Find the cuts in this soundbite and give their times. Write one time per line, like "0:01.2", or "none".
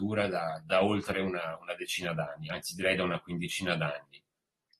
none

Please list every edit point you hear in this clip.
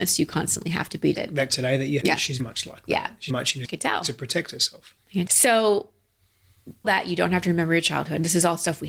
0:01.2
0:01.5
0:02.0
0:02.4
0:03.3
0:03.6
0:05.0
0:05.3
0:06.8

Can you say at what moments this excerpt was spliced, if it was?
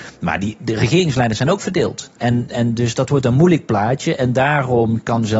0:02.1

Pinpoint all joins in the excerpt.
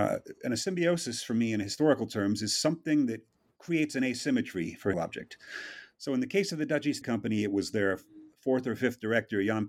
0:03.5
0:04.9
0:07.0

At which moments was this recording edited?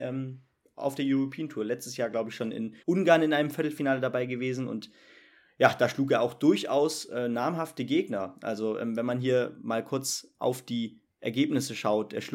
0:02.8

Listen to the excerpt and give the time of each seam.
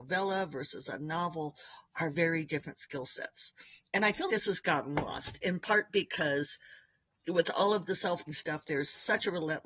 0:02.1
0:04.3
0:07.1
0:08.3

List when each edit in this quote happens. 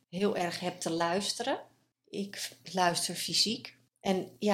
none

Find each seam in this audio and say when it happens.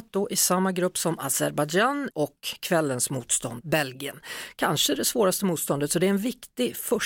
0:02.1
0:03.6

